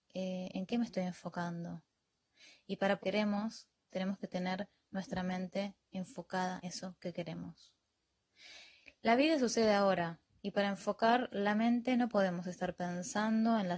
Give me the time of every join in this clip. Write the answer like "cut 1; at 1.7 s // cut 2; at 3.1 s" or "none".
cut 1; at 3.0 s // cut 2; at 6.6 s